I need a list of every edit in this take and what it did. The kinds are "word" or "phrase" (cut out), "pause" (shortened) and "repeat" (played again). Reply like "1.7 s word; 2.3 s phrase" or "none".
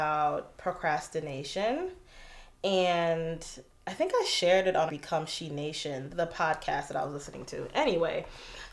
4.9 s word; 6.1 s word